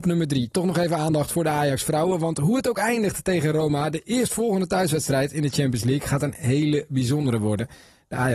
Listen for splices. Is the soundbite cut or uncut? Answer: uncut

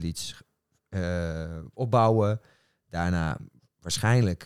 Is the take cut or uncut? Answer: uncut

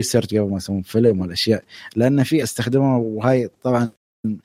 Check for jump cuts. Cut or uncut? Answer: cut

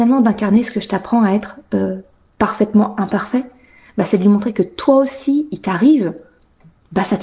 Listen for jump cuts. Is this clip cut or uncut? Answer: uncut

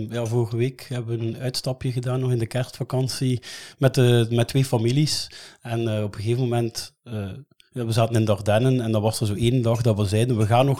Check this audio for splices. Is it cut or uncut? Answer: uncut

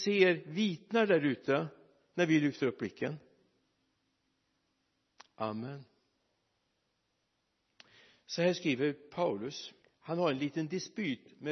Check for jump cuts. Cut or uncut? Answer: cut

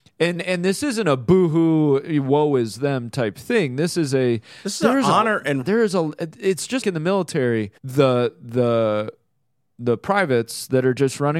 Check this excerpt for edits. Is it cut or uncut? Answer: cut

